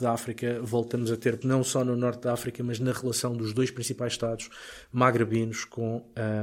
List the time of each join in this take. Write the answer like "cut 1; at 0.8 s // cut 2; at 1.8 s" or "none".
cut 1; at 1.4 s